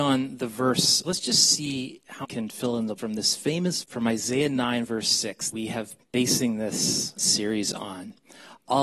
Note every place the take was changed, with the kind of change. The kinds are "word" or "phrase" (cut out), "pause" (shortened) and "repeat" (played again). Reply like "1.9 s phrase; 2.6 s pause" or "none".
1.0 s word; 2.2 s word; 3.0 s word; 3.8 s word; 5.5 s word; 6.0 s word; 7.2 s word